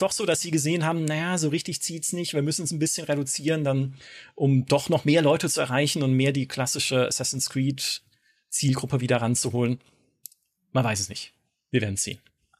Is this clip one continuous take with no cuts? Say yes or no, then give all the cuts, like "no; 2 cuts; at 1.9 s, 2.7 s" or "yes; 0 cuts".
yes; 0 cuts